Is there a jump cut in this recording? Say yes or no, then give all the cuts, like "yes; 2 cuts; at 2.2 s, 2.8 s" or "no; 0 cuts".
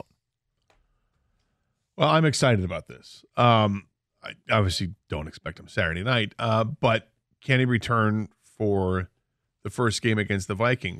no; 0 cuts